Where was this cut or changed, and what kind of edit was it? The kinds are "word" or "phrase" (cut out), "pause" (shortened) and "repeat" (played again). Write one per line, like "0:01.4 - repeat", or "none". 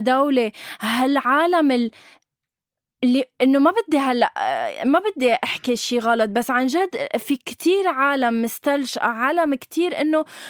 none